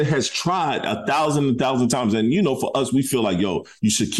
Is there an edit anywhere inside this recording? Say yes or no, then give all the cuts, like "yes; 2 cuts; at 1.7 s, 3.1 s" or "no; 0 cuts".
no; 0 cuts